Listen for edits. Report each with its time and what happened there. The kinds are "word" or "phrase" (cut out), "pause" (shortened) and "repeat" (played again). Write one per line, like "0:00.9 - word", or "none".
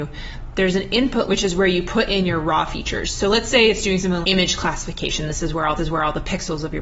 0:01.3 - word
0:04.2 - word
0:05.8 - repeat